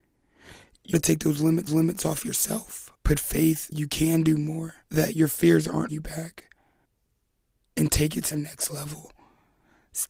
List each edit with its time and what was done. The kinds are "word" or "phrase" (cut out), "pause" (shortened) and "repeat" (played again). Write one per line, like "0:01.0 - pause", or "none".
0:00.9 - word
0:01.7 - repeat
0:03.0 - pause
0:03.7 - word
0:04.8 - pause
0:05.9 - word
0:06.9 - pause
0:08.3 - word